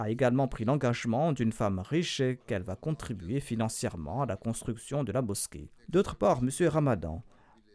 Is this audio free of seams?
no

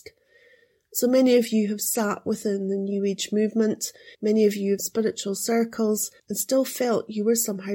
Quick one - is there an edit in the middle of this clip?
yes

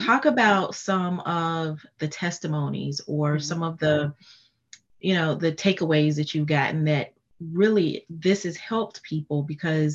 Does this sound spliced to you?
no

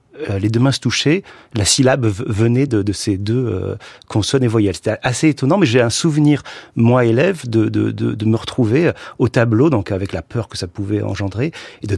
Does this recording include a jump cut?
no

